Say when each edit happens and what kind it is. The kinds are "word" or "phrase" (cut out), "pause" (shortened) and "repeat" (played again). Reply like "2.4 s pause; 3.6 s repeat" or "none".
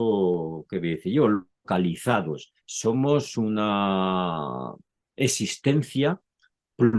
2.6 s pause; 4.8 s pause